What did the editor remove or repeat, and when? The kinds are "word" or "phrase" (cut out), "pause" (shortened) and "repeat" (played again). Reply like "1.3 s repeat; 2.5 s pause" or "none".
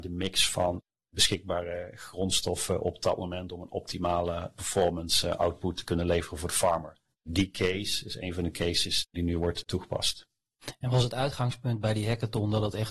none